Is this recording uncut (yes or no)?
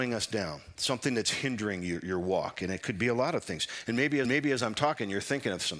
no